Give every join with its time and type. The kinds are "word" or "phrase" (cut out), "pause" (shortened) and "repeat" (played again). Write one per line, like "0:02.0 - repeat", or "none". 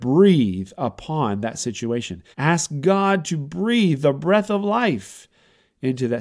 0:02.3 - pause